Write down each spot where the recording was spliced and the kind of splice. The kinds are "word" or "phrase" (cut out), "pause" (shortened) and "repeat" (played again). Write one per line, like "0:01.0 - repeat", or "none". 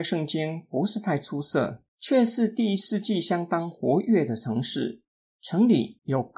0:01.9 - pause
0:05.1 - pause